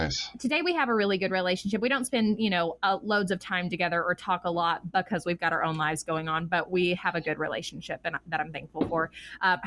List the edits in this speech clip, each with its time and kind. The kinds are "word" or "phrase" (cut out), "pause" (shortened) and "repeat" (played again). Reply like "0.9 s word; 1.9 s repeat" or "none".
none